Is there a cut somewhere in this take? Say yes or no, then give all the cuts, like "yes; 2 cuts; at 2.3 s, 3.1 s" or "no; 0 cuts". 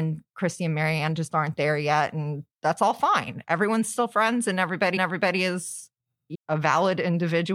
yes; 3 cuts; at 2.5 s, 5.0 s, 6.3 s